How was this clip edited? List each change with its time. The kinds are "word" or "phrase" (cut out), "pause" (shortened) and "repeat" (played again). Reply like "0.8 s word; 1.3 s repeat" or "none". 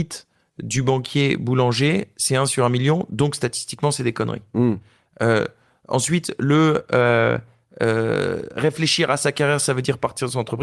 none

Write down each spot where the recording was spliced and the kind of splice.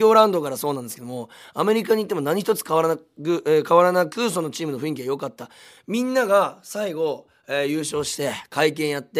none

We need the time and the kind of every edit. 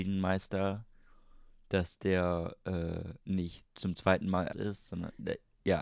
4.5 s word

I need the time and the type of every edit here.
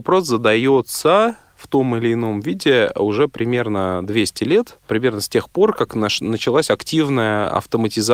none

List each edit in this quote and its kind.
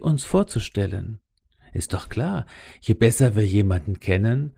none

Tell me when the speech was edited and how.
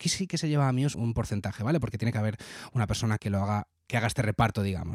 0.9 s word; 3.2 s word; 3.9 s word

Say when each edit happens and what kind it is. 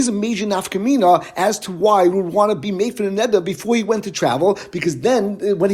2.1 s word

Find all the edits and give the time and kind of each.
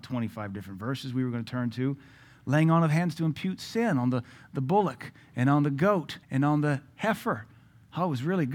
6.2 s pause

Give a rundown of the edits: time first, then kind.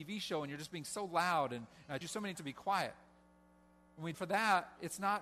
2.0 s word; 2.3 s word; 4.1 s word

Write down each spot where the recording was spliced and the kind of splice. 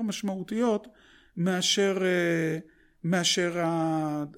none

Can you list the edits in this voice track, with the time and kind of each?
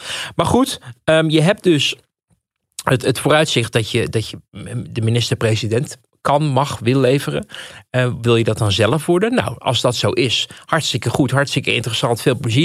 none

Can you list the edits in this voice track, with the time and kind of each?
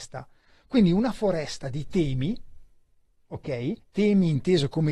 3.8 s pause

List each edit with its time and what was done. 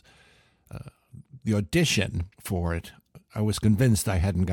2.4 s pause

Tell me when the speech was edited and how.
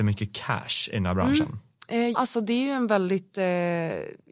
2.1 s word

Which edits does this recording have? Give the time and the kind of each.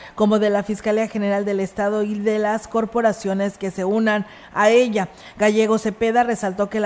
none

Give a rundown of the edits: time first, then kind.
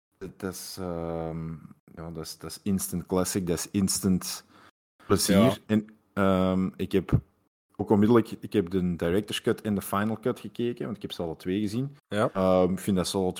12.0 s pause

